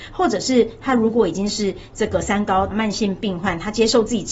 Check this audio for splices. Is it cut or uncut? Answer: cut